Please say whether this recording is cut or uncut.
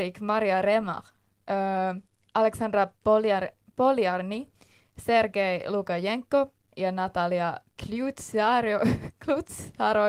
uncut